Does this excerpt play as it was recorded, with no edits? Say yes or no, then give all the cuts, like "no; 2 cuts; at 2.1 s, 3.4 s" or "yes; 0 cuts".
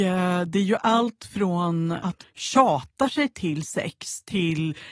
no; 1 cut; at 2.2 s